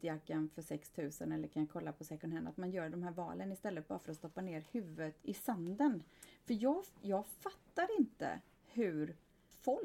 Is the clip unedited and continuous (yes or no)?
no